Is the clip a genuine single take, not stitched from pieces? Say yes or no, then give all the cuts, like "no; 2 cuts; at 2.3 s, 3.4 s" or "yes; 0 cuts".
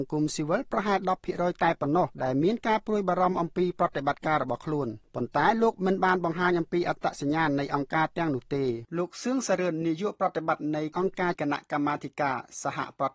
no; 1 cut; at 8.9 s